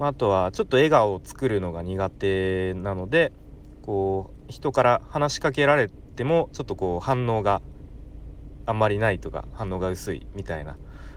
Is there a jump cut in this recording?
no; 0 cuts

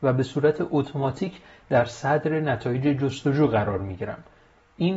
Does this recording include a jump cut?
no; 0 cuts

